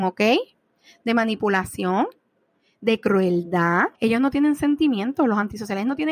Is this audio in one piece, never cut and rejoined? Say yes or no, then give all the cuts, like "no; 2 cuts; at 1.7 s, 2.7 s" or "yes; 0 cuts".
no; 1 cut; at 3.9 s